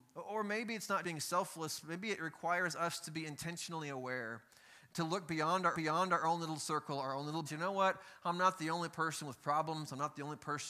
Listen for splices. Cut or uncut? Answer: cut